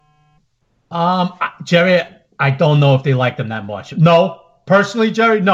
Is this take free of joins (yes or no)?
yes